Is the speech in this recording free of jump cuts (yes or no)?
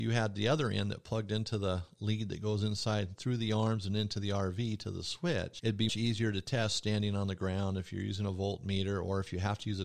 no